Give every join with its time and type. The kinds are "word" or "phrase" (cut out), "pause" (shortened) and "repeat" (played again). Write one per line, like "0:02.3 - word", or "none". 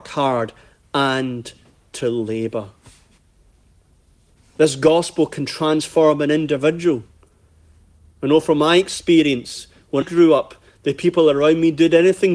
0:10.0 - word